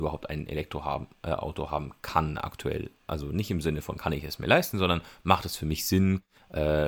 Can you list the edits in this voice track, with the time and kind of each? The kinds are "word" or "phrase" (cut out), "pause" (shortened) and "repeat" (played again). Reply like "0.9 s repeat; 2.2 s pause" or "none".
none